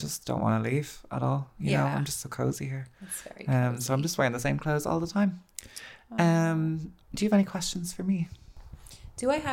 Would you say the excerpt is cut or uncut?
uncut